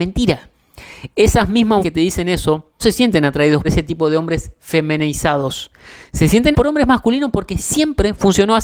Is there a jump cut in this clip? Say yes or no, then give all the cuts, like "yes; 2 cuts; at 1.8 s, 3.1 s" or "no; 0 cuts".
yes; 4 cuts; at 1.8 s, 2.8 s, 3.6 s, 6.5 s